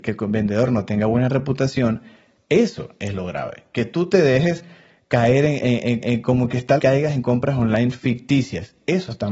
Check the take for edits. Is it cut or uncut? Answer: cut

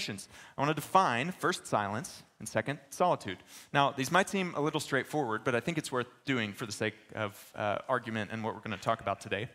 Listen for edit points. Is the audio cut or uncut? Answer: uncut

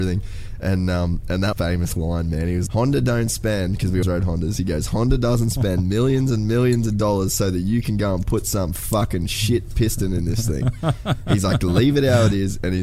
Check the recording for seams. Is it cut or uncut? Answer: cut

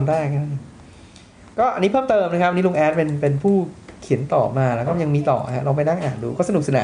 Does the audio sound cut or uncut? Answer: uncut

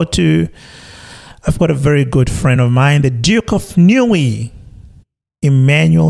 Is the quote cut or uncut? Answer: uncut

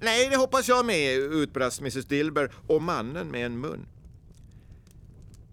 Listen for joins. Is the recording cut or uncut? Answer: uncut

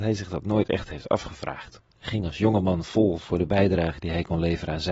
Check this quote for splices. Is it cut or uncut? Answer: cut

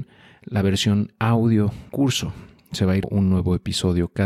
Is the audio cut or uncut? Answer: cut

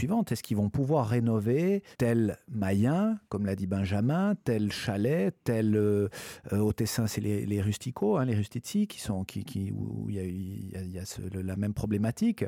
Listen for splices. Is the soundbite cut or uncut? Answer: cut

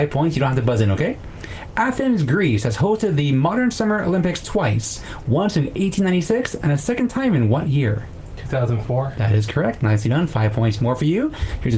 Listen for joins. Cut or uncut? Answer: uncut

